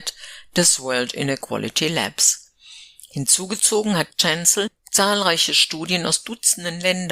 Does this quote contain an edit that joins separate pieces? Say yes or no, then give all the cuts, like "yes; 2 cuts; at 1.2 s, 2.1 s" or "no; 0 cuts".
no; 0 cuts